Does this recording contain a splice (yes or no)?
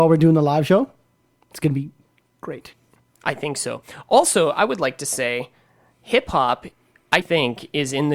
yes